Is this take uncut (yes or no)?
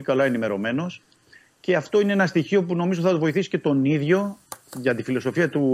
yes